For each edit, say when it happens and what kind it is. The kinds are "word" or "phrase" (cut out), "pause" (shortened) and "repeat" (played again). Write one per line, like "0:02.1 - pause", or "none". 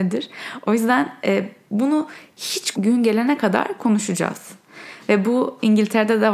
0:02.7 - word